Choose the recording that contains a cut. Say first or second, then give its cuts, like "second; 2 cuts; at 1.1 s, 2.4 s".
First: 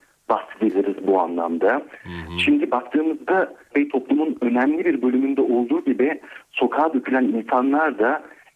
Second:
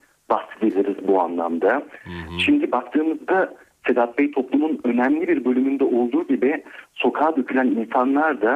first; 1 cut; at 3.7 s